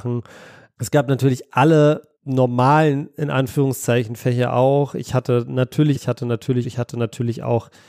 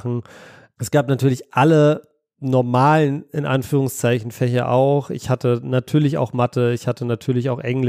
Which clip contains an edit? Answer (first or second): first